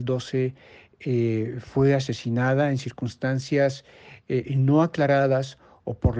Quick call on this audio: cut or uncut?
uncut